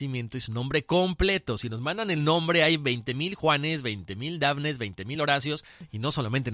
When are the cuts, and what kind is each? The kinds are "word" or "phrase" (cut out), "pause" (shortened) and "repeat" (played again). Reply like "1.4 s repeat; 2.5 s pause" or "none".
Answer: none